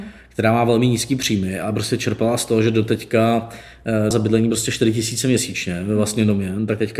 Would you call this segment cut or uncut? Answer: cut